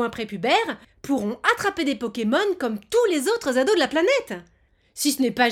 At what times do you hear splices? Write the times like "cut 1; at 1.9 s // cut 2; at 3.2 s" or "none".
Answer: none